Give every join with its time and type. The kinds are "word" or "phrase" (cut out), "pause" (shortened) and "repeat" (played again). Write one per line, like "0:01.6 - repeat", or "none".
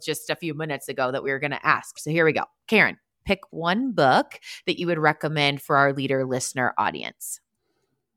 none